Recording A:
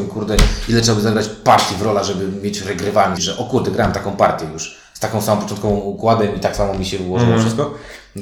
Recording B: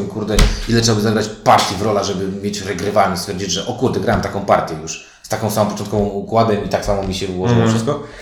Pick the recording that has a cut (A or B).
A